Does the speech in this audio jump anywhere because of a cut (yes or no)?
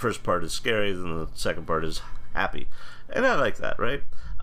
no